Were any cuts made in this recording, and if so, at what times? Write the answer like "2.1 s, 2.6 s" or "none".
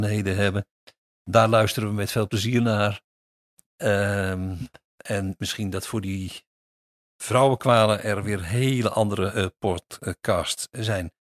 none